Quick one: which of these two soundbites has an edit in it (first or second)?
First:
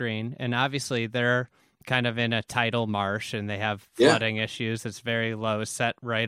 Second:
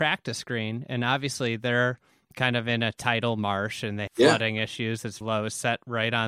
second